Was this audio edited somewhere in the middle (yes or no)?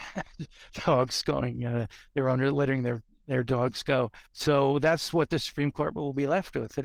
yes